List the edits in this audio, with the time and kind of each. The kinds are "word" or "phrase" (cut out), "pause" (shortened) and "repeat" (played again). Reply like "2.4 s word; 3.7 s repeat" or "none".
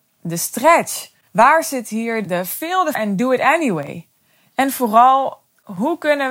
1.3 s pause; 2.2 s word; 2.9 s word; 4.2 s pause